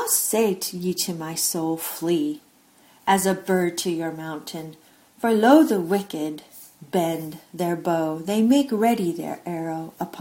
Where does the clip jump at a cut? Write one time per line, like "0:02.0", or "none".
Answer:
none